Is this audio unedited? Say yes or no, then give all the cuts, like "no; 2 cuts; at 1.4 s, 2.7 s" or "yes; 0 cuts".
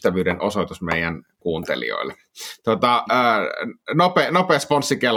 no; 1 cut; at 1.4 s